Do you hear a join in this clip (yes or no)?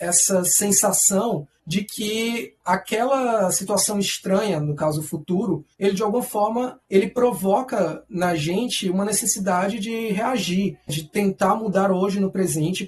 no